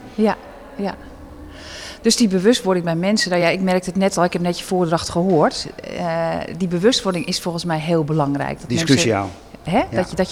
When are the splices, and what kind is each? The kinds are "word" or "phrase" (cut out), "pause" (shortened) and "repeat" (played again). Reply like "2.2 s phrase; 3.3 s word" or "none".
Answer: none